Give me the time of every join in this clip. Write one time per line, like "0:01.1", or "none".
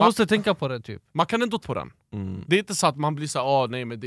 0:01.6